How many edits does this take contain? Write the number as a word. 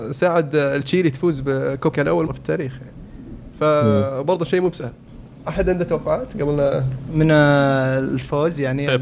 two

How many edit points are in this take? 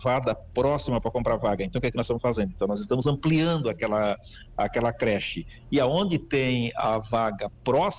zero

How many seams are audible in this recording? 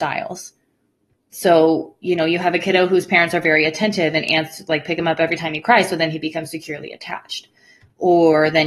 zero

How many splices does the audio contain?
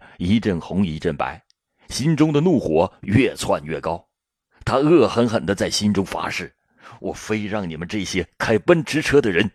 zero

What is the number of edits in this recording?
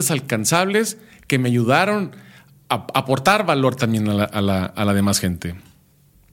zero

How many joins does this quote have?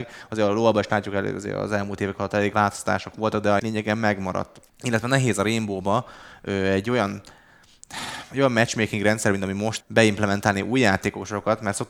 four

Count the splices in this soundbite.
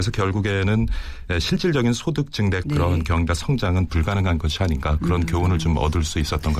two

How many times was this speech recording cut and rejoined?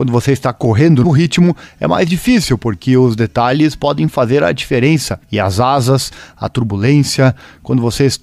two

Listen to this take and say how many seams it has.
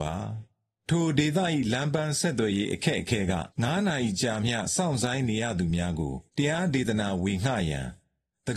two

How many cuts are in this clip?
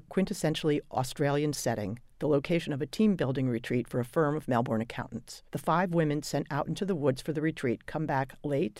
one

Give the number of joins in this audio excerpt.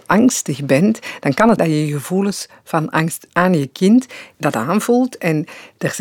three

